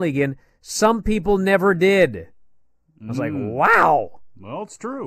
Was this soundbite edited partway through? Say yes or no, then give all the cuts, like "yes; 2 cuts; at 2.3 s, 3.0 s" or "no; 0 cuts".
no; 0 cuts